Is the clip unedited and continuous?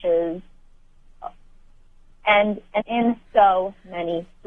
no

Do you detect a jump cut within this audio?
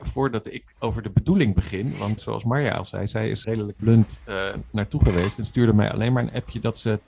yes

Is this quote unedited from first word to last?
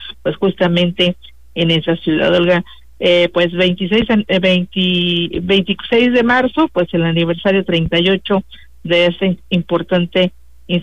yes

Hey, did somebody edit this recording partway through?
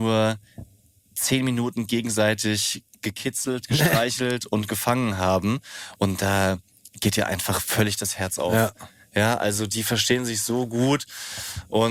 no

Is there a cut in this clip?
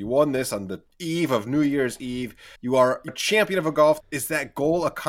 yes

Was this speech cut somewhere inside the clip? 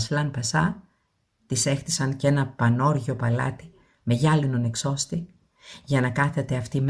no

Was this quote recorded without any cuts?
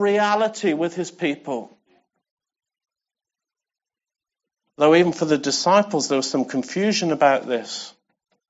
yes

